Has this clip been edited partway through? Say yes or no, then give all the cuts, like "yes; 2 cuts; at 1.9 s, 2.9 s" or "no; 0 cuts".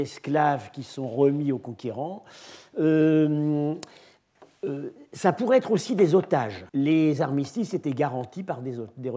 yes; 1 cut; at 6.7 s